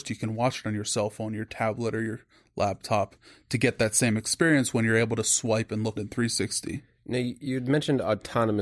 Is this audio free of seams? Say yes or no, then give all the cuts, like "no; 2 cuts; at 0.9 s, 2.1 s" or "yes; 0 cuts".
no; 1 cut; at 6.0 s